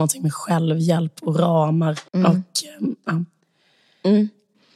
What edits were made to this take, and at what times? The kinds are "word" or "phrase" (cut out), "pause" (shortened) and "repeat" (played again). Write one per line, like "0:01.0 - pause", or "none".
0:02.1 - pause